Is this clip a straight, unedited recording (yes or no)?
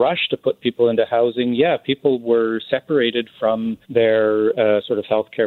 no